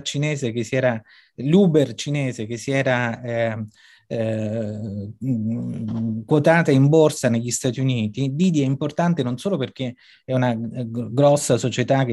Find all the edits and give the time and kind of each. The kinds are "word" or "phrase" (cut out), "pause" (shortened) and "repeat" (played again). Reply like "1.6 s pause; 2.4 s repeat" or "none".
none